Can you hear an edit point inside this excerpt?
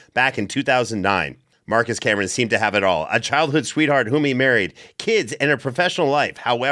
no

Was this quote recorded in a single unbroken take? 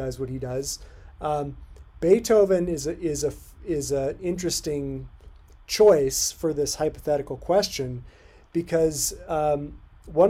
yes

